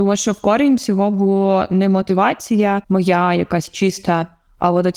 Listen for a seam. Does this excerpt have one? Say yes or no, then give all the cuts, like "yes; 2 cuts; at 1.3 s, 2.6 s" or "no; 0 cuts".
yes; 1 cut; at 2.8 s